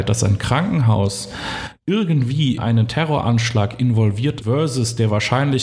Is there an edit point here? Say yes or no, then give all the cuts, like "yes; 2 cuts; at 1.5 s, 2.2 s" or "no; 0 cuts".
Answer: yes; 2 cuts; at 2.6 s, 4.4 s